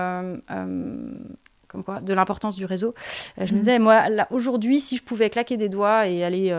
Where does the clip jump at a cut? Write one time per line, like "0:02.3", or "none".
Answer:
none

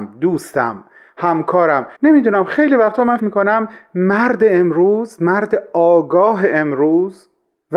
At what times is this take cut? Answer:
0:02.0
0:03.2

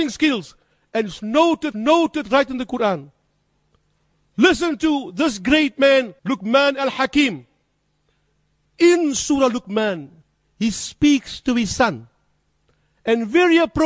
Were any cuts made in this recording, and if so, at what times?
0:01.7
0:06.2
0:10.2

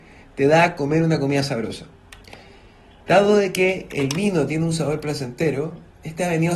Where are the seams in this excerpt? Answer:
none

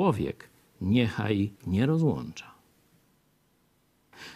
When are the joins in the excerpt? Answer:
0:01.6

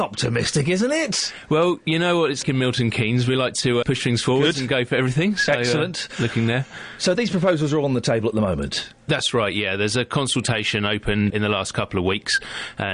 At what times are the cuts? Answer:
0:02.4
0:03.8
0:07.1
0:11.3

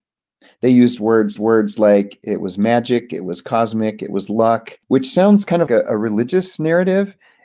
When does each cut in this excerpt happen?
0:01.4
0:04.8
0:05.7

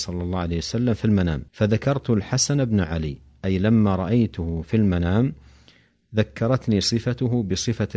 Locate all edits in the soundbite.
0:01.5

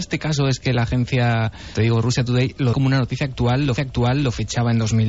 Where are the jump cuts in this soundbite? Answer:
0:01.7
0:02.7
0:03.8

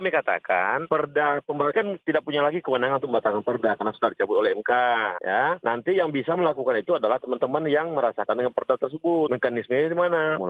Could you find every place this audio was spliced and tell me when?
0:01.7
0:08.3

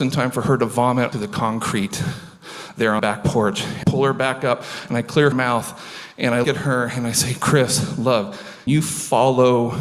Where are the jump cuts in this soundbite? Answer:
0:01.1
0:03.0
0:03.8
0:05.3
0:06.4
0:08.7

